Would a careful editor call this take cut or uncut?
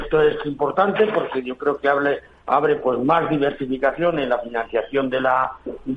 uncut